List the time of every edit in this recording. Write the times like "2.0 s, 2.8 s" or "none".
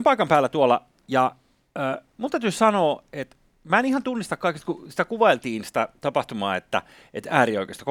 none